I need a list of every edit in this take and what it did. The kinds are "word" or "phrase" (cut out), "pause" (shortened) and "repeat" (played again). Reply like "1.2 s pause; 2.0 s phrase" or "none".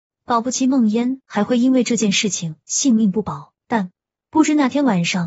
3.6 s pause